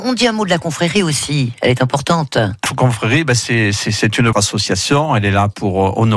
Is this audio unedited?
no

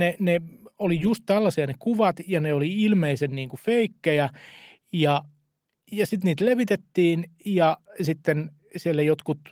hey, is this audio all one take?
yes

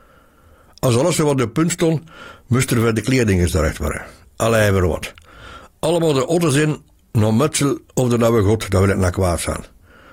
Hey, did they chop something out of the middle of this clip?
no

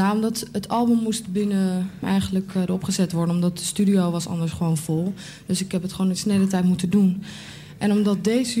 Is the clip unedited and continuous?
no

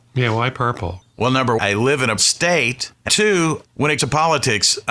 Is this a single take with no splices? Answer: no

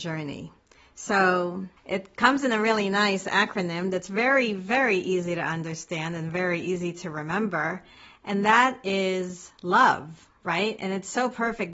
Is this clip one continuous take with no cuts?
no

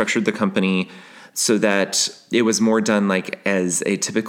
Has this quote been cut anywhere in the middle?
no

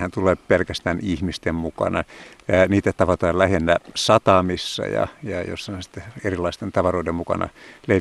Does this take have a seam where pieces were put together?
no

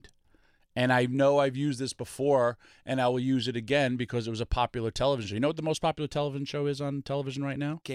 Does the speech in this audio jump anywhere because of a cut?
no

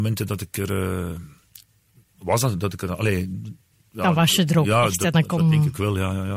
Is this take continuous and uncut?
yes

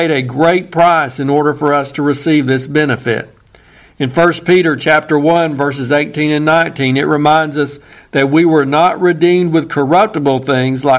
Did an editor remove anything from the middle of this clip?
no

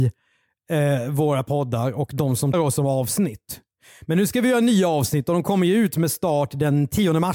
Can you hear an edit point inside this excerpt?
yes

